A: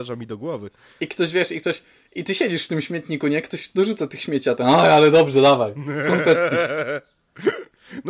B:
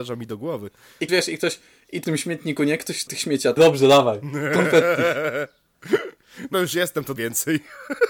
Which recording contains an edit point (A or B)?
B